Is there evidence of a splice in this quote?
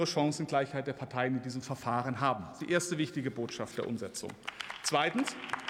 no; 0 cuts

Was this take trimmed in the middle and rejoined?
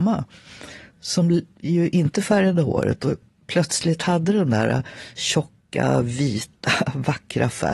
no; 0 cuts

